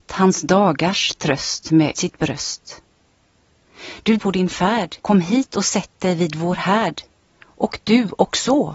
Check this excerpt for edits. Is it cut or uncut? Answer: cut